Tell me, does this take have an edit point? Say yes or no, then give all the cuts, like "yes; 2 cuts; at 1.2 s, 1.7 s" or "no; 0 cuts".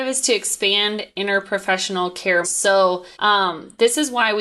yes; 2 cuts; at 2.4 s, 3.1 s